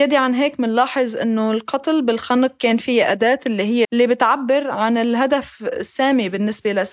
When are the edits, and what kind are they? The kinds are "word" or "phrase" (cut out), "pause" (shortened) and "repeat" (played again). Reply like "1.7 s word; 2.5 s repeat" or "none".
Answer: 3.8 s word